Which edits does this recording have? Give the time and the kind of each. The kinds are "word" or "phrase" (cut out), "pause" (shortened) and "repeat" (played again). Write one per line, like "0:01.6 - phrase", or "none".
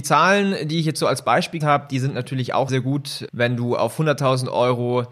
0:01.6 - word
0:02.7 - word
0:03.3 - word